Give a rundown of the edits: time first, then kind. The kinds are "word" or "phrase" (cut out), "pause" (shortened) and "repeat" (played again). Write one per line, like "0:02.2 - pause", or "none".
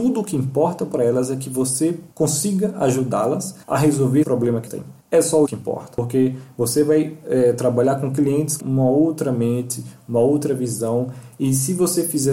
0:02.1 - pause
0:03.6 - pause
0:04.2 - word
0:04.7 - word
0:05.0 - pause
0:05.4 - word
0:08.6 - word